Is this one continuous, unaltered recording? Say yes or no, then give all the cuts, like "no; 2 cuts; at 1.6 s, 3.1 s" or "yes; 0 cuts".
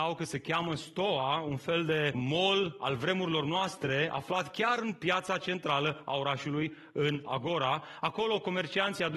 no; 1 cut; at 2.1 s